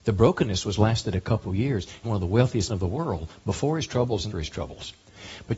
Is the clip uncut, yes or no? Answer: no